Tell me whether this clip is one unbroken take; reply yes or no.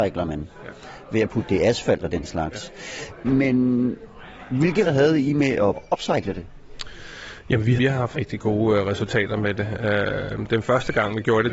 no